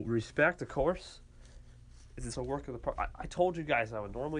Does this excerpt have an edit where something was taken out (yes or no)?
yes